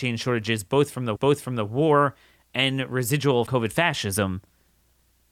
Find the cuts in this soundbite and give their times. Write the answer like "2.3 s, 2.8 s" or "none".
1.2 s, 3.5 s